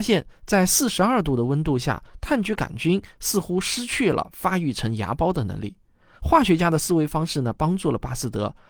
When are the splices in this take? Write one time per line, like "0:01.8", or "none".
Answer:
none